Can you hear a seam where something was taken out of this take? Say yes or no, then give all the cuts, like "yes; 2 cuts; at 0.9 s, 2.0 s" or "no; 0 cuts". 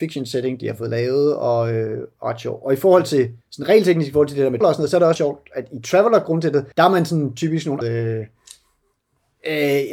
yes; 5 cuts; at 3.4 s, 4.6 s, 5.2 s, 6.7 s, 7.8 s